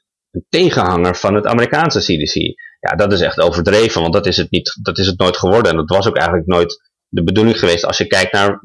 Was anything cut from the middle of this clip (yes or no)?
no